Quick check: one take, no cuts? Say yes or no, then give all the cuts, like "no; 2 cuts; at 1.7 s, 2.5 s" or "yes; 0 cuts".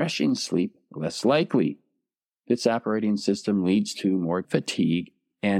no; 1 cut; at 4.4 s